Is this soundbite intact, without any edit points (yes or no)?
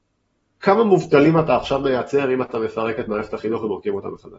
yes